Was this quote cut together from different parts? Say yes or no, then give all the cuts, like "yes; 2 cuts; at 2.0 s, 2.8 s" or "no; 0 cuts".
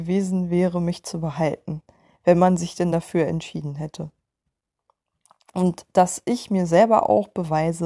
no; 0 cuts